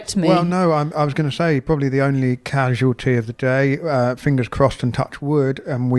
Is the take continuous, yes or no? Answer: yes